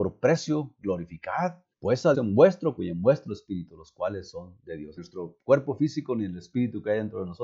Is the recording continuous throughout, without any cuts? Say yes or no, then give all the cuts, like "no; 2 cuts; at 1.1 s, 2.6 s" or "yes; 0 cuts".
no; 4 cuts; at 1.7 s, 2.1 s, 2.8 s, 5.0 s